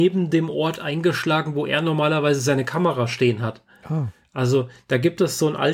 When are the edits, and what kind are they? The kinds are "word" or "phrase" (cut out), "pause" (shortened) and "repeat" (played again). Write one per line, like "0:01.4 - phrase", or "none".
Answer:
0:04.2 - pause